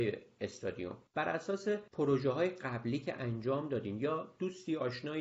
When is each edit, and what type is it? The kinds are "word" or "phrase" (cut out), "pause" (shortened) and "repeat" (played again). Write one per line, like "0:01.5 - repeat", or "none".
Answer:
0:01.1 - pause
0:01.9 - pause